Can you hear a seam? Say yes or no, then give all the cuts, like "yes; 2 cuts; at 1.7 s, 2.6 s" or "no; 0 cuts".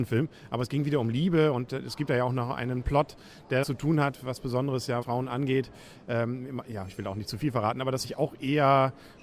yes; 3 cuts; at 3.6 s, 5.0 s, 8.0 s